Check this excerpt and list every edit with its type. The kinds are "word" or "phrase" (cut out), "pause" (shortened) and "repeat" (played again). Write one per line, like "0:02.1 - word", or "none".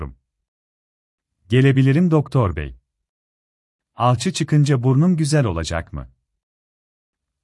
none